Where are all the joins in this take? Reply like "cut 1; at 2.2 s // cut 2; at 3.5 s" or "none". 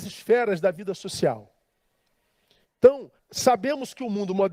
cut 1; at 3.2 s